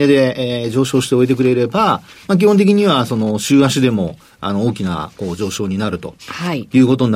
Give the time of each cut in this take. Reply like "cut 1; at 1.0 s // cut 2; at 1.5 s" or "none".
none